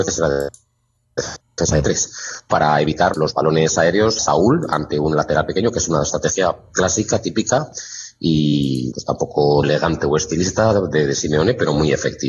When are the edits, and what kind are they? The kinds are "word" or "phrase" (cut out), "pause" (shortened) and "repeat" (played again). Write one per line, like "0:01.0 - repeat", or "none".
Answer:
0:01.4 - pause
0:03.1 - word
0:04.2 - word
0:08.9 - word
0:09.6 - phrase